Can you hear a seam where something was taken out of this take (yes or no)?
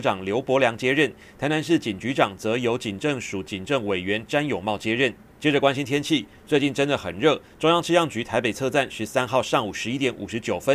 yes